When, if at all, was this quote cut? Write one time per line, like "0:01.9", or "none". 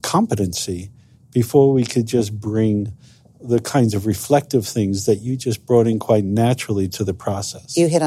none